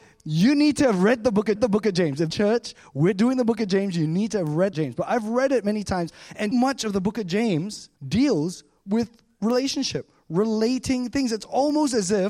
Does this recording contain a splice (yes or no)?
yes